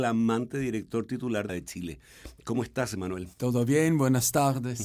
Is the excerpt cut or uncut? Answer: cut